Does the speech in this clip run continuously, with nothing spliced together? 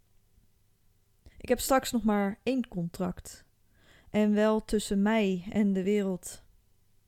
no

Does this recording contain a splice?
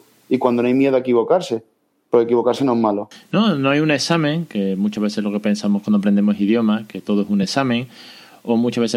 no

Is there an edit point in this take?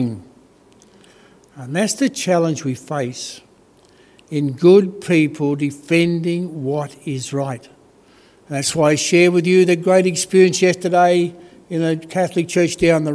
no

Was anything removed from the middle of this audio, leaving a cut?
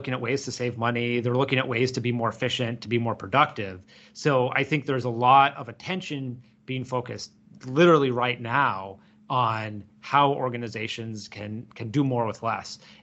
no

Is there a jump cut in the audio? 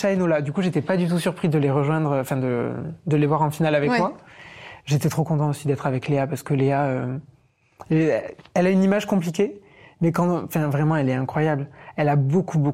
no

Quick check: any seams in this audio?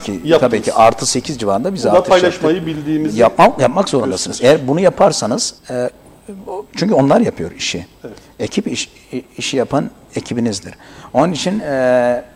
yes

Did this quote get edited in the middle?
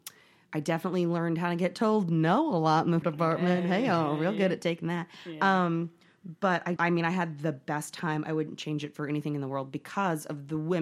yes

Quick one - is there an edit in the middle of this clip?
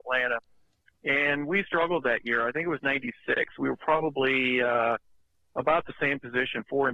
no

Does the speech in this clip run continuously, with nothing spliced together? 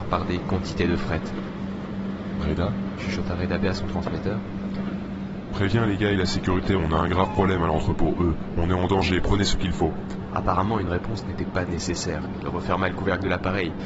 yes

